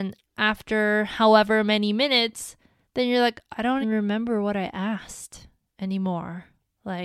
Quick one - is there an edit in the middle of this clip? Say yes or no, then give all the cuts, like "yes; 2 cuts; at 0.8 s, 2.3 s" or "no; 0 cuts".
yes; 2 cuts; at 2.8 s, 3.8 s